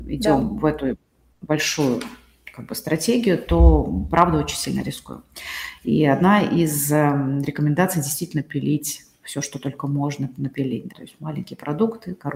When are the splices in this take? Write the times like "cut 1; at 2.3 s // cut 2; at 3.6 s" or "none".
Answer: cut 1; at 10.9 s